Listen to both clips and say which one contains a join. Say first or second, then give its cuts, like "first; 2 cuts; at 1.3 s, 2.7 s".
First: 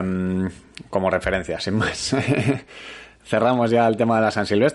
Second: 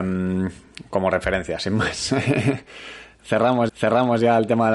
second; 1 cut; at 3.7 s